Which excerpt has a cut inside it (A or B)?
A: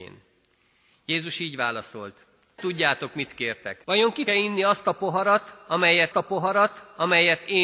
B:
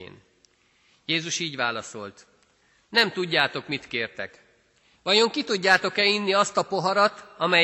A